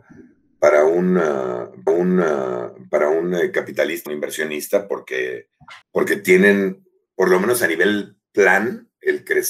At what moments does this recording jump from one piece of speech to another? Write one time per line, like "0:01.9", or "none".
0:01.9
0:04.1
0:05.8
0:07.1